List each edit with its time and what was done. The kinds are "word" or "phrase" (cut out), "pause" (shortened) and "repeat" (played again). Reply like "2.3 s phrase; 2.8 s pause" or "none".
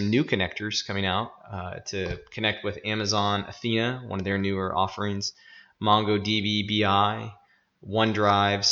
none